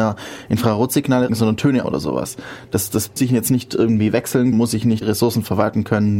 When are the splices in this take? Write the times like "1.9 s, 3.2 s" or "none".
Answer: 1.3 s, 1.8 s, 3.2 s, 4.5 s, 5.0 s